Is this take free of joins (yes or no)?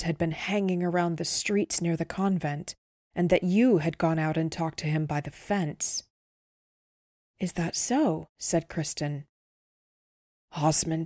yes